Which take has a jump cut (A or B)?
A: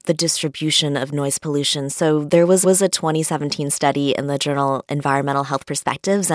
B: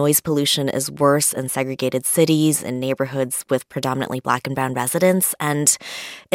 A